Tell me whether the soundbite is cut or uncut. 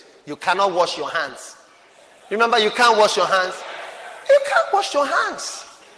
uncut